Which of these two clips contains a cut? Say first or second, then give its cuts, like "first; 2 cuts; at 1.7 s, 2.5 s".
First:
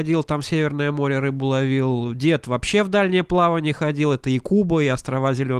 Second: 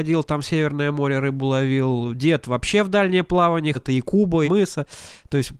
second; 2 cuts; at 3.7 s, 4.4 s